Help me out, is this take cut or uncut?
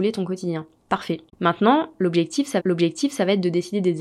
cut